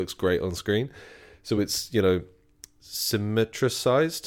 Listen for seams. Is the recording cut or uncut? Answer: uncut